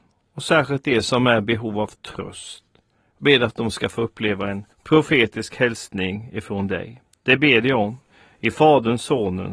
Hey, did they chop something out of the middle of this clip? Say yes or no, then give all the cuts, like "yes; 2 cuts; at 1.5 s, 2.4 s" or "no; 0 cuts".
yes; 1 cut; at 4.7 s